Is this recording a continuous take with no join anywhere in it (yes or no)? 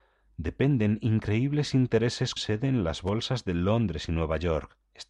no